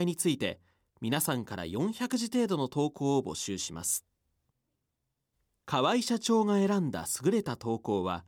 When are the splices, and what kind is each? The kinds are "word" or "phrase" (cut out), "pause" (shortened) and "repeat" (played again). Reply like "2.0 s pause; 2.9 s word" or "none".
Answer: none

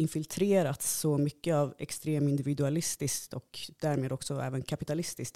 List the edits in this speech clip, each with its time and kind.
none

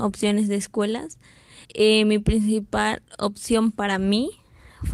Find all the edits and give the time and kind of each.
1.6 s pause

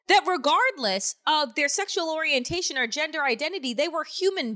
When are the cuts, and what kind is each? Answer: none

